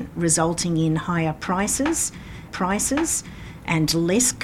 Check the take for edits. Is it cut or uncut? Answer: cut